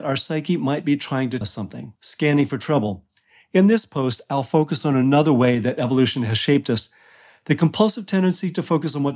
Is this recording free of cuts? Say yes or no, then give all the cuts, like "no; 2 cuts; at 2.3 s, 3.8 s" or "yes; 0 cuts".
no; 2 cuts; at 1.4 s, 2.0 s